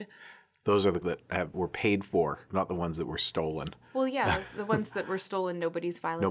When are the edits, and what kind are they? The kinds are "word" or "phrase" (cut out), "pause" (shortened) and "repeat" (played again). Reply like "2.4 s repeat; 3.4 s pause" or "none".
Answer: 1.0 s word; 1.5 s phrase; 2.5 s word

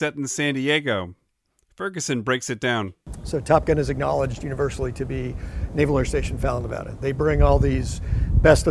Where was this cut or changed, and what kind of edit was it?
none

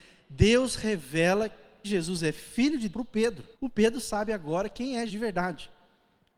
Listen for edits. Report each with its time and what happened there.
1.8 s word; 2.9 s word; 3.5 s pause; 5.1 s word

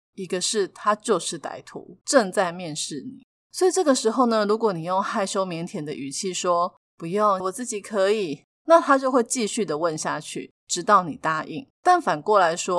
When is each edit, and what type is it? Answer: 7.4 s phrase; 11.7 s pause

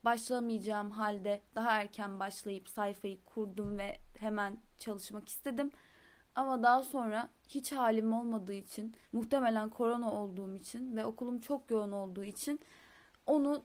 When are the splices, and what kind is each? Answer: 4.1 s pause; 7.4 s pause; 9.0 s pause

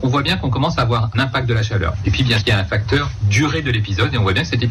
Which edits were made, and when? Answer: 1.1 s word; 2.4 s word

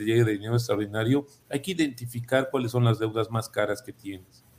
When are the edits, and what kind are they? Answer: none

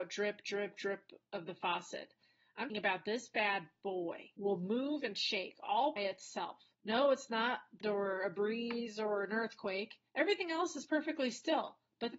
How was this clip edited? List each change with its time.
1.2 s pause; 2.7 s word; 6.0 s word; 6.7 s pause; 7.8 s word; 10.1 s pause

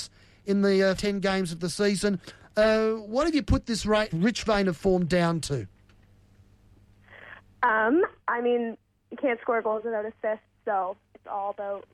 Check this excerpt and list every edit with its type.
1.0 s word; 4.1 s word; 8.2 s pause; 9.0 s pause; 11.0 s pause

